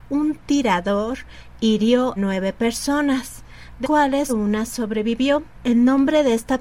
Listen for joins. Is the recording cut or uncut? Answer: cut